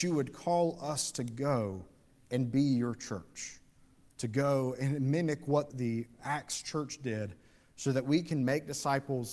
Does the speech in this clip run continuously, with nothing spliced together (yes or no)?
no